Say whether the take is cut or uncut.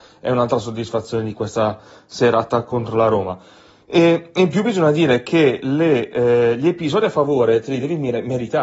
uncut